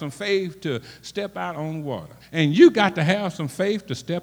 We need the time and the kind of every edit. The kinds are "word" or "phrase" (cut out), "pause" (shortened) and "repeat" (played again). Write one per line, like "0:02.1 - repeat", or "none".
0:02.2 - pause